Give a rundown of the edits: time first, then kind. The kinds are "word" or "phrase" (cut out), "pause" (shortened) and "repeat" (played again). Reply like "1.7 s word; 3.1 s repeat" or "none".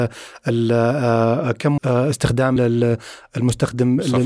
1.8 s word; 2.6 s word